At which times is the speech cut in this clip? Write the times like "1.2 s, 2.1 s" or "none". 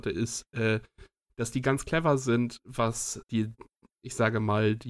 3.2 s